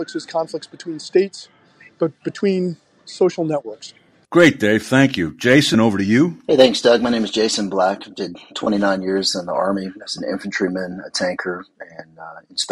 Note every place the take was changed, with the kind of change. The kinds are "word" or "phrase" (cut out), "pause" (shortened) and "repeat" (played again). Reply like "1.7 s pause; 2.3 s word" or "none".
5.7 s word